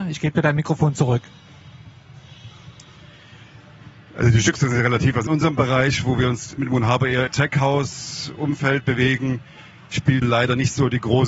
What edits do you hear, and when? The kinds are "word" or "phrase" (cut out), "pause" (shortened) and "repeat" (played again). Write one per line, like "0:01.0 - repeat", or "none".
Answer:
0:05.3 - word
0:06.6 - word
0:07.3 - word
0:10.2 - word

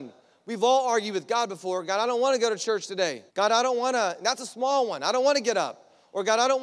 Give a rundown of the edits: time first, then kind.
0:03.3 - pause

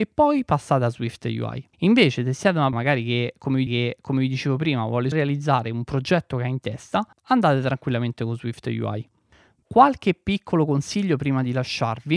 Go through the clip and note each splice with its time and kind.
0:01.7 - pause
0:02.7 - word
0:03.7 - repeat
0:05.1 - word
0:07.1 - pause
0:09.6 - word

